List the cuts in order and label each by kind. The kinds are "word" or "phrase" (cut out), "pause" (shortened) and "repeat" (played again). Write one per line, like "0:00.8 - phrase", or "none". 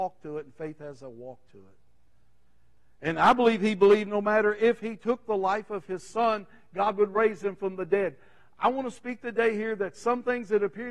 none